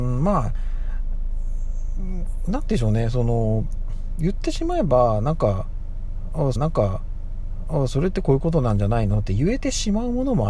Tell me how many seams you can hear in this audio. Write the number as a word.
one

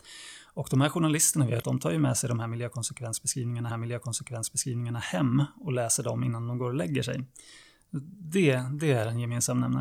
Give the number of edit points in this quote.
two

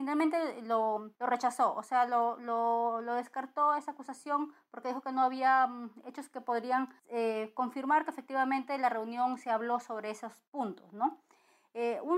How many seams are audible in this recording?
three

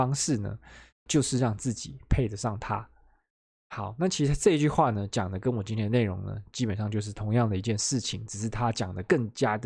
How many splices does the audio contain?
one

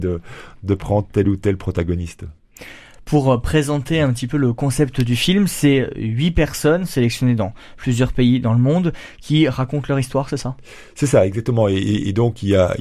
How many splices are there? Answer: zero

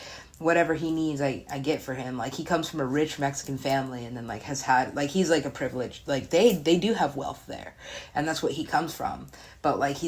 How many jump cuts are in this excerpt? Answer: zero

